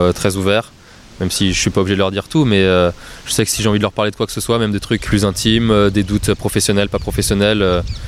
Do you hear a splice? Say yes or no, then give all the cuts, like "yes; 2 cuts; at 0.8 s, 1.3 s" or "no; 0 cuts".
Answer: yes; 1 cut; at 5.1 s